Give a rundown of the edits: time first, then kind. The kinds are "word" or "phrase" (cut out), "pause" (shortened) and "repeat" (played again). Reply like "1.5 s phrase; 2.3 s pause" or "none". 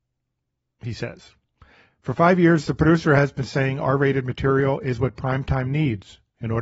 none